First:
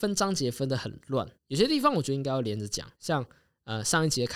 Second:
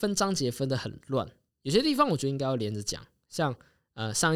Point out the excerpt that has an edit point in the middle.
first; 2 cuts; at 1.3 s, 2.9 s

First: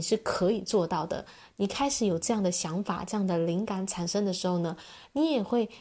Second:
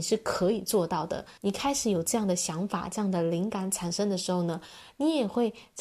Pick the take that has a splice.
second; 1 cut; at 1.4 s

